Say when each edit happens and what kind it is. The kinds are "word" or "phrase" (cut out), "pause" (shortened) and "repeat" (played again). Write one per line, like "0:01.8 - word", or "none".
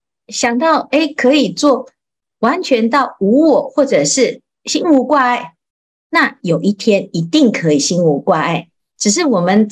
none